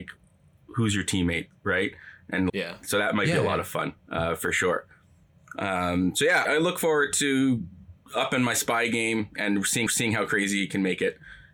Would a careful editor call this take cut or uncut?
cut